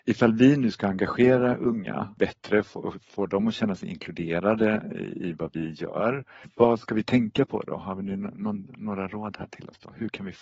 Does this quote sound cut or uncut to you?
uncut